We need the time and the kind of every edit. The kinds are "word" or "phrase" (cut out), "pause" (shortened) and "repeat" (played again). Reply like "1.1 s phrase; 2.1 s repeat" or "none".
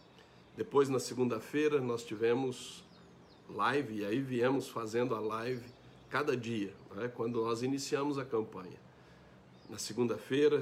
none